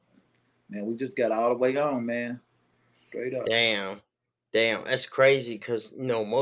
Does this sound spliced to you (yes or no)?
no